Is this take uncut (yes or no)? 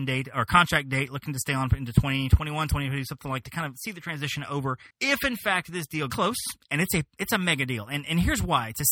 no